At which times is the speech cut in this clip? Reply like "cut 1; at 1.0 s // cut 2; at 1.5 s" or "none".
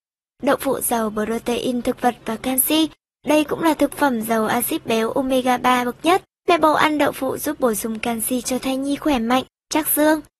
none